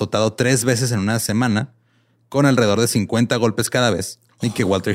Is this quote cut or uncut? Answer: uncut